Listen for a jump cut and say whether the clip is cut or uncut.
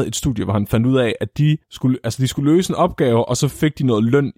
cut